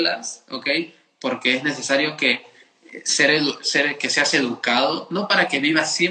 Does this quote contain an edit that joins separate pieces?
no; 0 cuts

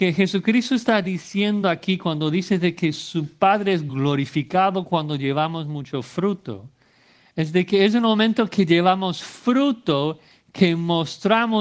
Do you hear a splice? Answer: no; 0 cuts

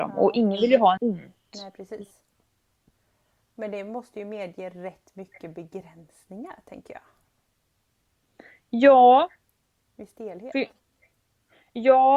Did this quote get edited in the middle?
yes; 1 cut; at 1.0 s

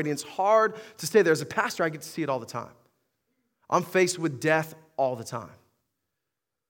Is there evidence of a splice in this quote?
no; 0 cuts

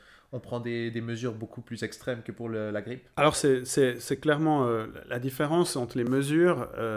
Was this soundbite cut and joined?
yes; 1 cut; at 3.1 s

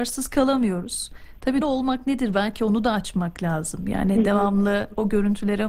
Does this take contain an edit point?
yes; 1 cut; at 1.6 s

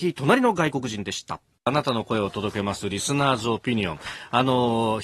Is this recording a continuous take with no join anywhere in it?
no; 1 cut; at 1.6 s

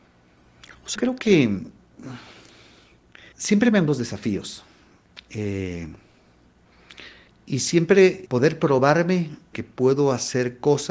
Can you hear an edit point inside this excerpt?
yes; 6 cuts; at 1.0 s, 3.3 s, 3.9 s, 7.3 s, 8.3 s, 9.5 s

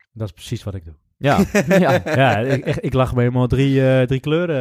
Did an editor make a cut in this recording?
no; 0 cuts

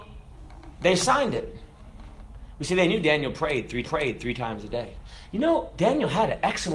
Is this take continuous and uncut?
no; 1 cut; at 3.8 s

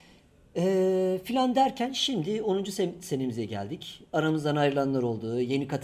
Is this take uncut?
yes; 0 cuts

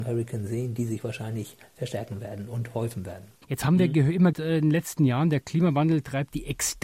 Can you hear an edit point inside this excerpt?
yes; 2 cuts; at 3.3 s, 4.3 s

